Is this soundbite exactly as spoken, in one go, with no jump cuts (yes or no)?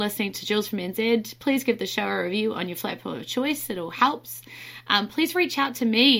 yes